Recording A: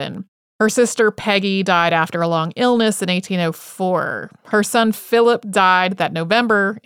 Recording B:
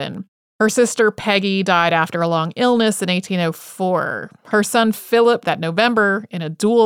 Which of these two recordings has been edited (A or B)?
B